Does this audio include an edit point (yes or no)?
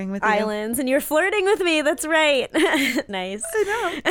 yes